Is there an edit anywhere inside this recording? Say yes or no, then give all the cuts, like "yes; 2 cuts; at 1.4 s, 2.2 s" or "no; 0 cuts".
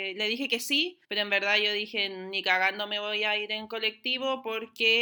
yes; 1 cut; at 1.0 s